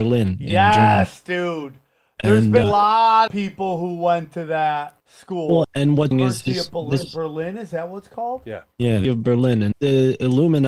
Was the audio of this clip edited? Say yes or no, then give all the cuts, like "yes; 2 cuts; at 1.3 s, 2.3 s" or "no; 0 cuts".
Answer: yes; 8 cuts; at 2.6 s, 3.3 s, 5.0 s, 5.6 s, 6.1 s, 8.7 s, 9.0 s, 9.7 s